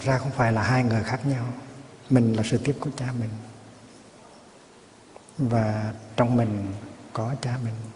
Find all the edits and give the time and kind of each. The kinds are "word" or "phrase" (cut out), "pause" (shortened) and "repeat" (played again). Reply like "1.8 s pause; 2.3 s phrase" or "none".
2.8 s word